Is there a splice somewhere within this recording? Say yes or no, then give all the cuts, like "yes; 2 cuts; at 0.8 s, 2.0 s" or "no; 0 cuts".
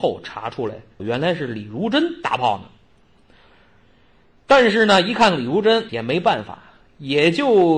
yes; 2 cuts; at 1.0 s, 5.9 s